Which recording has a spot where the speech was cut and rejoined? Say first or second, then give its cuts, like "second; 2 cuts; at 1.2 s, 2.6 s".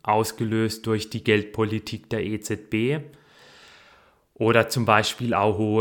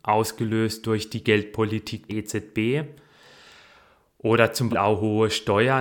second; 2 cuts; at 2.1 s, 4.7 s